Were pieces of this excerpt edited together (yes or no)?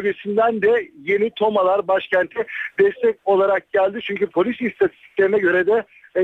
no